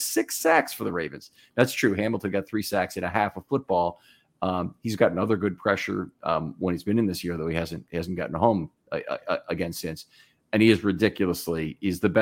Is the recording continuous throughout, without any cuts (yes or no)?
yes